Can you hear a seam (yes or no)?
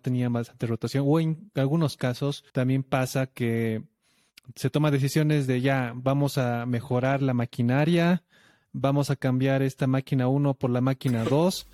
yes